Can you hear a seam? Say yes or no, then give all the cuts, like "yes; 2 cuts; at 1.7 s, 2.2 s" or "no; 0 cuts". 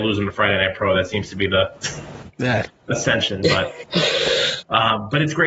no; 0 cuts